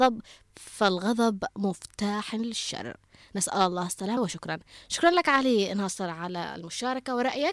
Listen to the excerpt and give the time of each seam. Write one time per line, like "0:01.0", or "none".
0:04.2